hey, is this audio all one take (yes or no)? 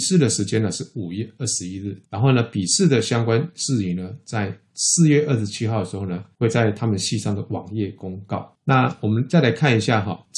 yes